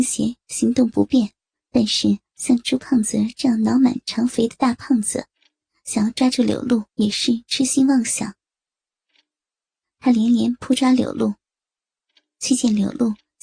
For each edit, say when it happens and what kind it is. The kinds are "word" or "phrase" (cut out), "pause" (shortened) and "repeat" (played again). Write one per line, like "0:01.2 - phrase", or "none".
0:01.5 - pause
0:06.9 - pause